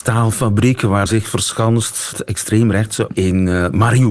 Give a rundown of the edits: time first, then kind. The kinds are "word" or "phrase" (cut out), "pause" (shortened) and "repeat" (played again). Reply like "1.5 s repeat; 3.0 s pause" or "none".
1.1 s phrase; 2.1 s word; 3.1 s phrase